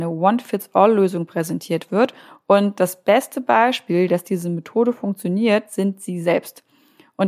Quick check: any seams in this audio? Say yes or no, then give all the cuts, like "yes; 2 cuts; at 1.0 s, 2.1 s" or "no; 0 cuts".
no; 0 cuts